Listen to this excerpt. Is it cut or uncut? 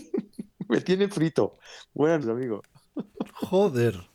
cut